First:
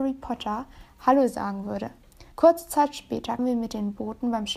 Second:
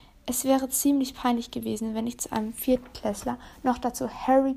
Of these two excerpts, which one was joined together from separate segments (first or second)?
first